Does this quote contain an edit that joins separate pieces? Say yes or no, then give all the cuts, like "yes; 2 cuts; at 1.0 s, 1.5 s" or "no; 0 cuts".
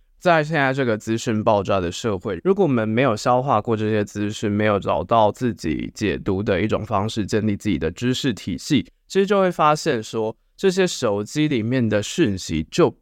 no; 0 cuts